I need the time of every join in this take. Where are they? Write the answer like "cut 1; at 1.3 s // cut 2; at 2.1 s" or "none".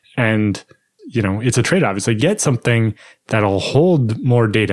cut 1; at 1.0 s // cut 2; at 2.2 s